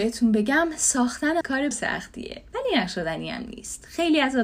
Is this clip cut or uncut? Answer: cut